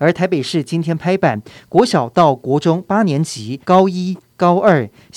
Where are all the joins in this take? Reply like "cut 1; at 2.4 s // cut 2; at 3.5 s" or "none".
cut 1; at 3.6 s